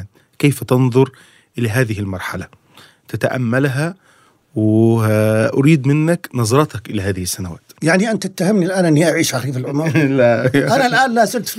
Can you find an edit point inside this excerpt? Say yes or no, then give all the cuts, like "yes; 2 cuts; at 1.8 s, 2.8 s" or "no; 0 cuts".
no; 0 cuts